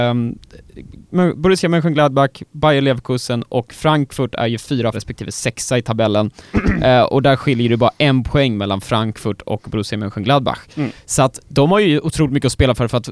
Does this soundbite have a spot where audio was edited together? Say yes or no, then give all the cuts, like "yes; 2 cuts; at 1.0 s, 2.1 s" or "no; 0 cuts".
yes; 1 cut; at 4.9 s